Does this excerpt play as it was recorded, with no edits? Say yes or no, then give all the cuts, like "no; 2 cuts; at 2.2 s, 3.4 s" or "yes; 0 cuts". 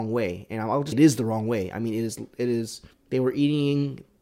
no; 2 cuts; at 0.9 s, 2.9 s